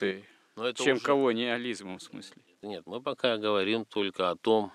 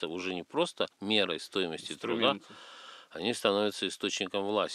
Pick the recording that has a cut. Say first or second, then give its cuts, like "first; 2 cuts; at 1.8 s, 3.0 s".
first; 2 cuts; at 2.0 s, 2.6 s